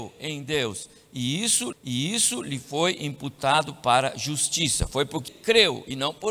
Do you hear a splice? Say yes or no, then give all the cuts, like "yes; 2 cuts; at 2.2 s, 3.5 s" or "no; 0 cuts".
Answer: yes; 2 cuts; at 1.7 s, 5.3 s